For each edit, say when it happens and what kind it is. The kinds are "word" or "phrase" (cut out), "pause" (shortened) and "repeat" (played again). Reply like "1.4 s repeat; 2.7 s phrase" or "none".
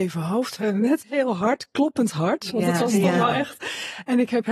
1.0 s word